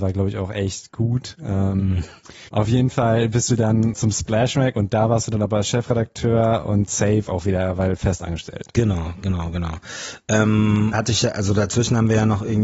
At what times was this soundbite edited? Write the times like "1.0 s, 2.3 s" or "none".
2.5 s, 3.9 s, 10.9 s